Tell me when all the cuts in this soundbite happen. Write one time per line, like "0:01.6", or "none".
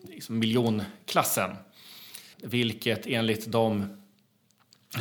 none

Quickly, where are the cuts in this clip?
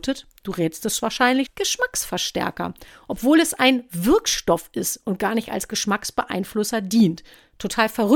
0:01.5

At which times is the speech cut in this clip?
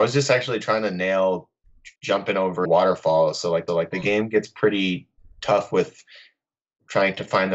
0:02.0
0:02.6
0:03.7

